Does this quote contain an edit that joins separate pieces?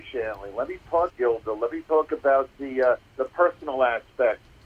yes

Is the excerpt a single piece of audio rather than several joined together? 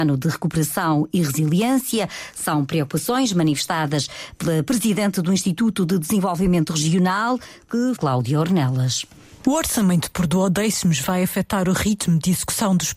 no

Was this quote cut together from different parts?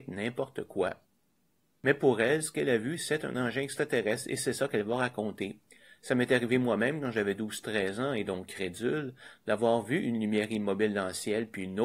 no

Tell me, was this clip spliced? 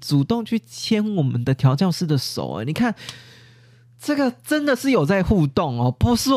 no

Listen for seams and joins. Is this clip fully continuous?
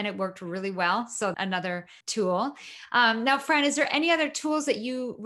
no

